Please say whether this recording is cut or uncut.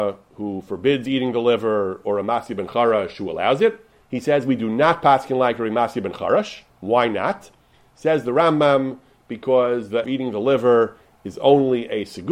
cut